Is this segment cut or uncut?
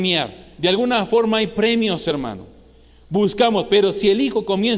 uncut